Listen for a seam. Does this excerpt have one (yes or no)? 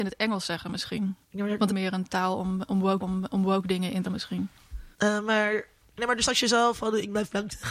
yes